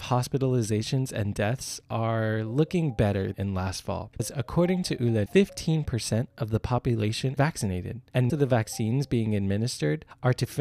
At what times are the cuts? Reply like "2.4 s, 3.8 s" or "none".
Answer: 3.3 s, 4.2 s, 5.3 s, 7.4 s, 8.3 s